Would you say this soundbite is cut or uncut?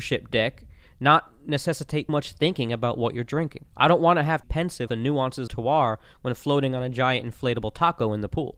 cut